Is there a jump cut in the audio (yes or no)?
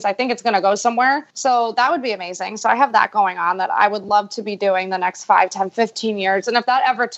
yes